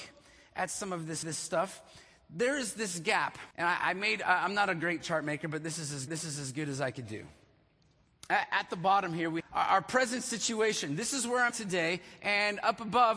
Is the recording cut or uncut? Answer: cut